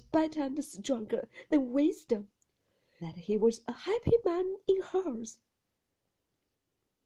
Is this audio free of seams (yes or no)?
no